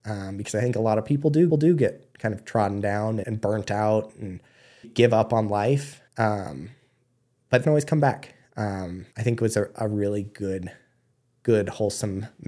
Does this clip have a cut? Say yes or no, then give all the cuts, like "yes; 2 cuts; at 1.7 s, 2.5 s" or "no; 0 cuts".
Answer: yes; 6 cuts; at 1.5 s, 3.2 s, 4.8 s, 6.1 s, 7.6 s, 9.1 s